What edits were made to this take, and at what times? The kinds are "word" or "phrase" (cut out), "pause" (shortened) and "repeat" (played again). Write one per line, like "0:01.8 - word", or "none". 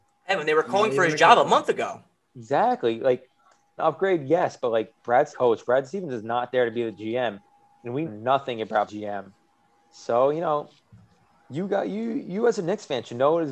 0:03.8 - phrase
0:05.3 - phrase
0:08.1 - word
0:08.9 - phrase